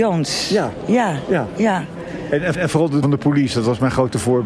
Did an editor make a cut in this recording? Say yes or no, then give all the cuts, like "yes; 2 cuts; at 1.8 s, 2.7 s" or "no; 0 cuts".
yes; 2 cuts; at 2.5 s, 3.0 s